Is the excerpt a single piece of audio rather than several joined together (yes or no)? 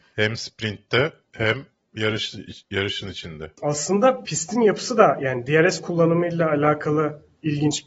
yes